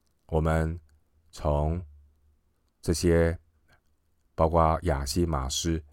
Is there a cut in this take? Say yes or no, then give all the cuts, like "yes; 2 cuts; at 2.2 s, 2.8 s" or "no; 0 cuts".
no; 0 cuts